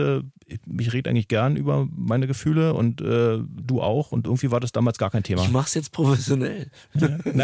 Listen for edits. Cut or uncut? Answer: uncut